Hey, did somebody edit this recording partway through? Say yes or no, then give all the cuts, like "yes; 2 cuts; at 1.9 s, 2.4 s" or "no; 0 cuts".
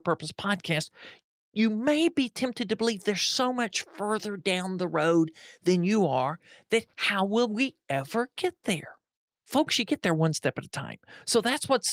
no; 0 cuts